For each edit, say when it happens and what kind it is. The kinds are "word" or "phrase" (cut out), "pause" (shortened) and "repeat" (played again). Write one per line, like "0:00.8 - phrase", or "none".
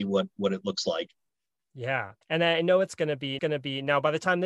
0:02.2 - pause
0:03.4 - repeat